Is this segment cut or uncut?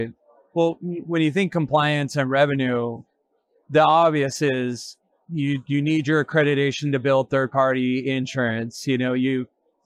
uncut